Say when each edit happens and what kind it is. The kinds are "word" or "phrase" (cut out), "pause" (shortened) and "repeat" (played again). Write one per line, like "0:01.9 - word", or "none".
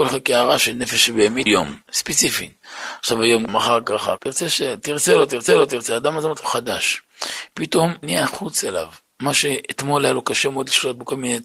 0:01.5 - word
0:01.8 - pause
0:03.5 - word
0:04.2 - phrase
0:05.5 - repeat
0:06.4 - phrase
0:08.0 - word

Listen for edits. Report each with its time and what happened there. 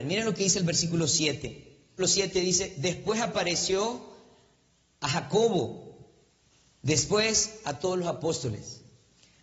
0:02.0 - word

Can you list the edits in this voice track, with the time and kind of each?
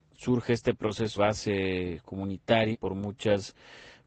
0:01.2 - word
0:02.7 - word

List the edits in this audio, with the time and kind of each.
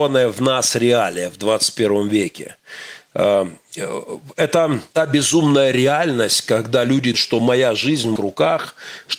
0:04.9 - pause
0:07.1 - word
0:08.2 - word

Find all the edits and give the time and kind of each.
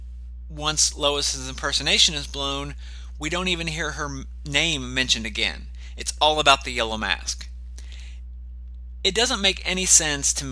none

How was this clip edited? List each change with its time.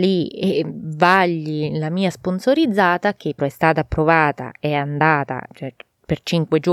0:03.4 - word
0:05.5 - word

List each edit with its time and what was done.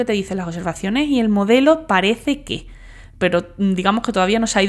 none

